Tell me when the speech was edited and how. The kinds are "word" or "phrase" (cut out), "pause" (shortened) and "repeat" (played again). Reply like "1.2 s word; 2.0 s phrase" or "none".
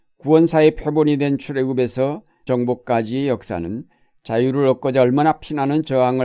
2.5 s word